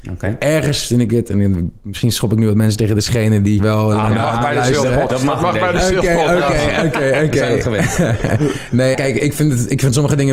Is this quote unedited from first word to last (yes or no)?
no